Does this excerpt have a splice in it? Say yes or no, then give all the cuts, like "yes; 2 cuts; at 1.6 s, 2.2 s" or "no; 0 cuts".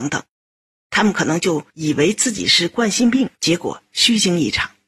yes; 2 cuts; at 1.7 s, 3.4 s